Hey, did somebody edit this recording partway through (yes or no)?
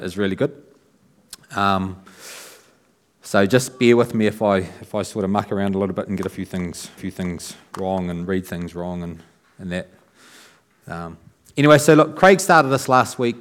yes